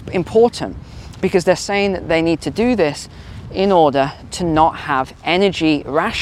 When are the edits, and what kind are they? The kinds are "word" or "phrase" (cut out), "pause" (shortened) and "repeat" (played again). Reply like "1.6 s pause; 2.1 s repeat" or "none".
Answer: none